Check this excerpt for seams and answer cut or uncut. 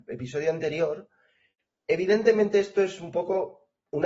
uncut